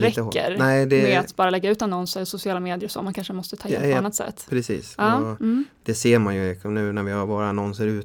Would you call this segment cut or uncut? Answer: uncut